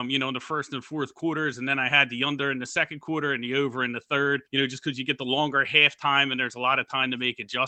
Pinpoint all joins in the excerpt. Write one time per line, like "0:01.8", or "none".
0:04.5